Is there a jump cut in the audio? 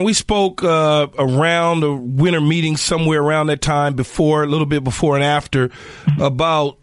no; 0 cuts

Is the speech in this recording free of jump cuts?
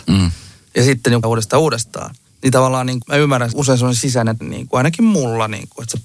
no; 5 cuts; at 1.2 s, 2.3 s, 3.0 s, 3.5 s, 4.4 s

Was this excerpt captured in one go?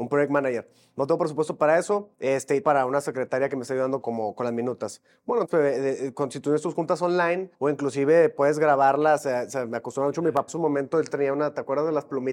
no; 7 cuts; at 2.1 s, 2.6 s, 4.0 s, 5.4 s, 7.5 s, 10.5 s, 11.1 s

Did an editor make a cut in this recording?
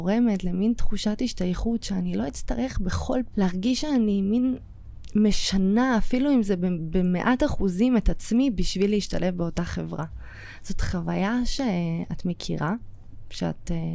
yes; 1 cut; at 3.3 s

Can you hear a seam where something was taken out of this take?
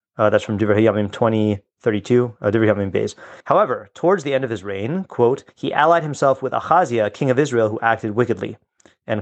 yes; 2 cuts; at 3.4 s, 5.5 s

